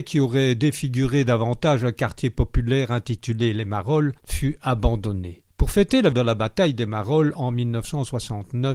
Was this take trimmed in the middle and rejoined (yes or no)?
yes